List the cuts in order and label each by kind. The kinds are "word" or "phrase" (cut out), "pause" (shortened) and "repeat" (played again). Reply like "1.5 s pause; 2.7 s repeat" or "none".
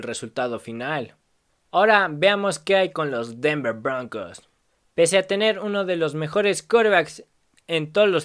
none